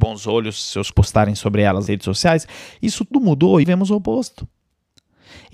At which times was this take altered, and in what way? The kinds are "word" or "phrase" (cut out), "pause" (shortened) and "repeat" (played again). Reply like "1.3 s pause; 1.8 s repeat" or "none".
0.9 s word; 1.9 s word; 3.1 s word; 3.6 s word